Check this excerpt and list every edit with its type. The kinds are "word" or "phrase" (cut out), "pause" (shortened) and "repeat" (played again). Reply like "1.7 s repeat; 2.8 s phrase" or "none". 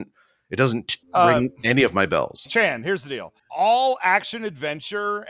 1.0 s pause; 3.4 s pause